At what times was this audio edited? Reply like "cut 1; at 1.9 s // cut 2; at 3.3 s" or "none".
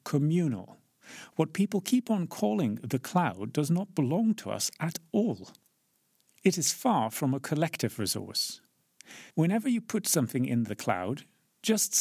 cut 1; at 9.3 s